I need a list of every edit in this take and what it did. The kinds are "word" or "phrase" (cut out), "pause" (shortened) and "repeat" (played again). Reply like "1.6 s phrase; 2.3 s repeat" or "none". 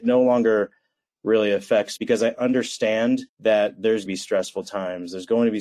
2.0 s word; 3.3 s pause; 4.1 s phrase